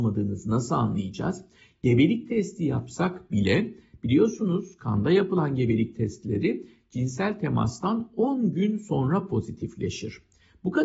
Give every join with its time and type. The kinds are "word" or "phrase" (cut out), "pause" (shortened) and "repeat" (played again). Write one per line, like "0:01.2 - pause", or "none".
none